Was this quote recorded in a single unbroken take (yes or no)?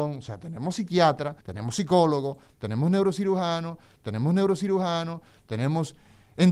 no